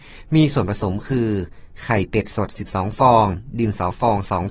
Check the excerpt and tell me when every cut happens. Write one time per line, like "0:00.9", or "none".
none